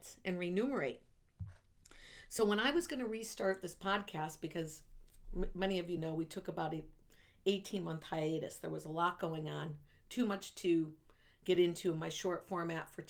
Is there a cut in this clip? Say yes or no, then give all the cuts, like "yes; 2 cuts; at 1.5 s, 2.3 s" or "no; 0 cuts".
no; 0 cuts